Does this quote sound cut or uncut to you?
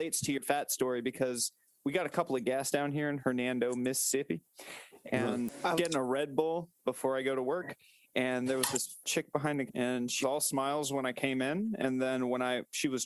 cut